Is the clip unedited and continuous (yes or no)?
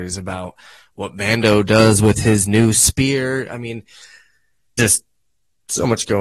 no